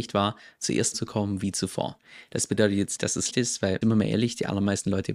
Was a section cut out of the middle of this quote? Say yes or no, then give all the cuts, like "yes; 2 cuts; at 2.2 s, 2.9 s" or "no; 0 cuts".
yes; 4 cuts; at 0.9 s, 3.0 s, 3.3 s, 3.8 s